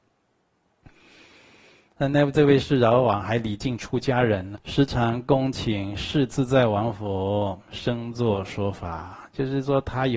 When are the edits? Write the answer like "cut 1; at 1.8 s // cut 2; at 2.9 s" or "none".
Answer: cut 1; at 4.5 s